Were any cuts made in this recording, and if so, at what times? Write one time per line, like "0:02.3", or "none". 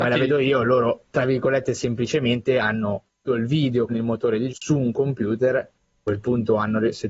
0:03.3
0:03.9
0:04.5